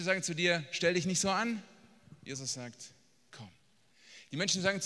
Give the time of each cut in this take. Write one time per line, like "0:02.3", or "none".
none